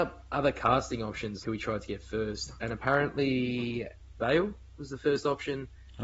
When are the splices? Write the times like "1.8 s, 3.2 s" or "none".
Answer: 1.4 s, 4.2 s